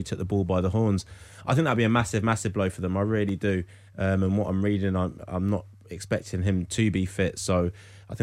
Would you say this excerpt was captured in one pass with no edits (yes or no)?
yes